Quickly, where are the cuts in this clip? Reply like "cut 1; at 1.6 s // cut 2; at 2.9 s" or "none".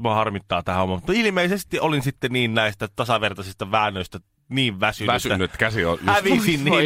none